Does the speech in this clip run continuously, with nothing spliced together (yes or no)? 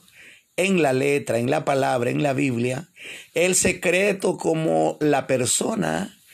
yes